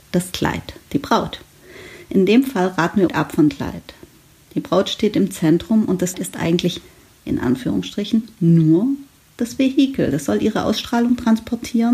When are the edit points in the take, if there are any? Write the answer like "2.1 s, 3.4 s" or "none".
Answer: 3.1 s, 3.5 s, 6.1 s